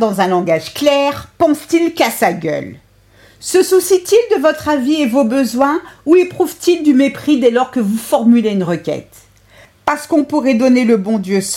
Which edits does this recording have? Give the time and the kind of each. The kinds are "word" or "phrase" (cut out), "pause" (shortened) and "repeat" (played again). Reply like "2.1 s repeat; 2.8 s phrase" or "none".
none